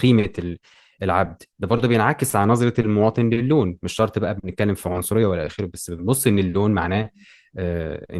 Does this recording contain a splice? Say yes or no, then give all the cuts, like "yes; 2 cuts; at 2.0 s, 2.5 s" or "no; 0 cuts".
no; 0 cuts